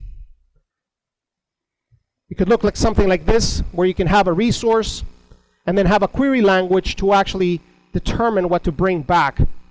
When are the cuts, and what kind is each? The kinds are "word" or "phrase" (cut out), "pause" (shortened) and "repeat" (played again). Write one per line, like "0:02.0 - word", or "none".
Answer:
none